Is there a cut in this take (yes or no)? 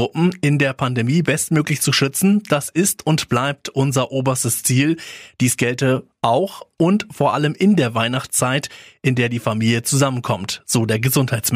no